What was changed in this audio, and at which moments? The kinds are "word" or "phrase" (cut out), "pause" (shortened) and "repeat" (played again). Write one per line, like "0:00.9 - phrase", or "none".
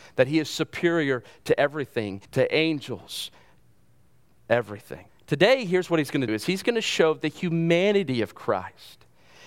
0:02.2 - pause
0:05.1 - pause
0:06.3 - word